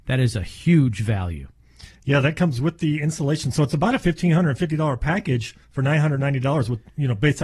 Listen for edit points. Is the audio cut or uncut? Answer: cut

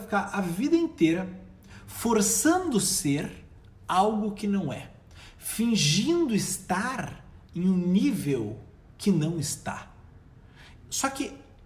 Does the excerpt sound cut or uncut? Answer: uncut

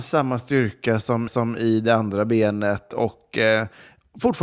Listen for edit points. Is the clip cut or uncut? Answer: cut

